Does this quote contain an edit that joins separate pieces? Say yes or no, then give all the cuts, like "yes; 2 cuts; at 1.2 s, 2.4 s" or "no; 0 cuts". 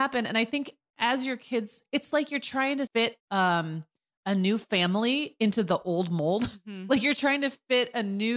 yes; 2 cuts; at 2.9 s, 3.2 s